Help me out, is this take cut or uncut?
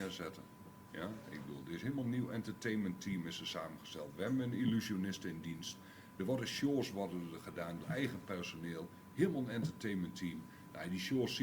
cut